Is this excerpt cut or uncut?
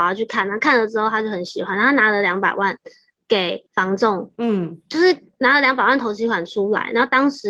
cut